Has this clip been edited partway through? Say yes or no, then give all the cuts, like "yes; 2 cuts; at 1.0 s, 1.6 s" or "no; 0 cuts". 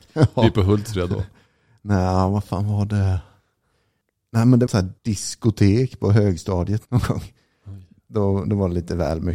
yes; 3 cuts; at 4.7 s, 5.0 s, 6.8 s